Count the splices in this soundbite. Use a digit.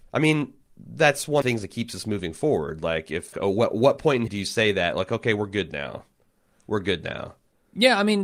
3